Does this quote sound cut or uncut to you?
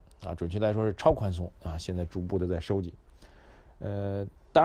uncut